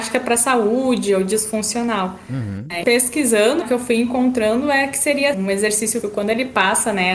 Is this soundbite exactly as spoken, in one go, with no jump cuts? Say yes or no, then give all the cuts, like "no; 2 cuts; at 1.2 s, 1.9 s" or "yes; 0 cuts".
no; 4 cuts; at 2.8 s, 3.6 s, 5.3 s, 6.0 s